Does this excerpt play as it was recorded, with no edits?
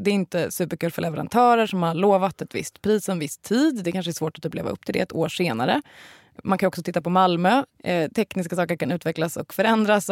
yes; 0 cuts

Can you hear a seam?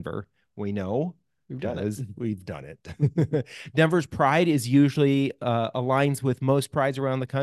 no; 0 cuts

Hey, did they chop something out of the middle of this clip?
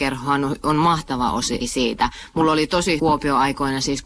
yes; 2 cuts; at 1.6 s, 3.0 s

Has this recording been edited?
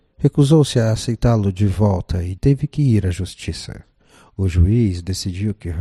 yes; 1 cut; at 2.4 s

